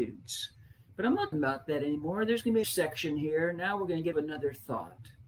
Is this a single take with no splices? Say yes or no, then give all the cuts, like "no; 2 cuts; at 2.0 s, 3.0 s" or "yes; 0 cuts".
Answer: no; 3 cuts; at 1.3 s, 2.6 s, 4.1 s